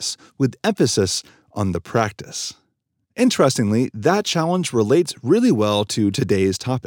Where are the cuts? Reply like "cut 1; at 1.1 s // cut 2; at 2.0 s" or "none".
none